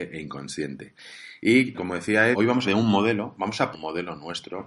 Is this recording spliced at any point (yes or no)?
yes